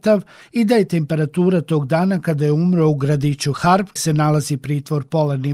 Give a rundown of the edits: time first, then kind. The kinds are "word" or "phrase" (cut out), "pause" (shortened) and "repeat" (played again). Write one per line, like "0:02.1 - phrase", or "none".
0:04.0 - word